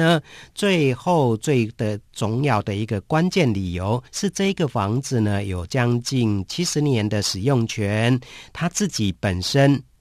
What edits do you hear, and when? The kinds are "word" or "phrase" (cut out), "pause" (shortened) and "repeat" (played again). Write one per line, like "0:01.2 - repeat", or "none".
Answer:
0:04.1 - pause